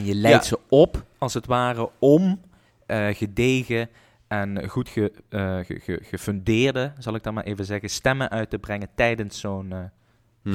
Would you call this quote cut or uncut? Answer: uncut